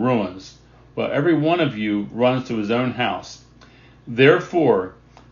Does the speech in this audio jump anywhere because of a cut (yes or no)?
no